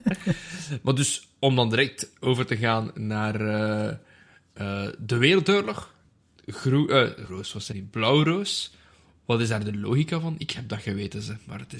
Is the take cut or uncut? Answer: cut